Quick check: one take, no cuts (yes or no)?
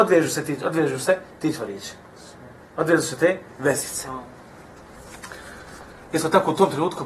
yes